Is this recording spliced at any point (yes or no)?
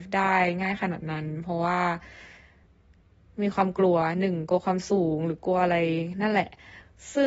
no